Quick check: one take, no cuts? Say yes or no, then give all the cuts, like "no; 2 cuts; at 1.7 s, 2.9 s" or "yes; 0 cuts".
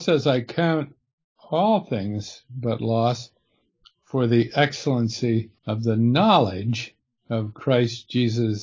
no; 1 cut; at 5.6 s